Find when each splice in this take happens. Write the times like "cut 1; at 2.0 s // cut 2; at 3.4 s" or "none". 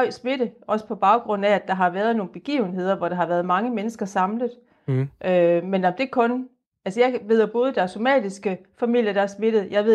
none